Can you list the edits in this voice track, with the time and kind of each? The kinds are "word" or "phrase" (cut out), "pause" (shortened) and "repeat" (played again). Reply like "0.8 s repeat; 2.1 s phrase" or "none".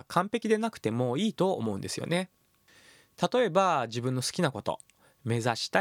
none